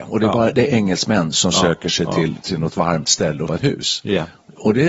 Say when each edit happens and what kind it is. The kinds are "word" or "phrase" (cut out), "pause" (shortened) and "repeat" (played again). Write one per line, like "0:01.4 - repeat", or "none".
0:03.5 - phrase